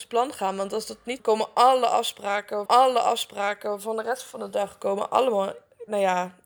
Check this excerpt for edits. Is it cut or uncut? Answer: cut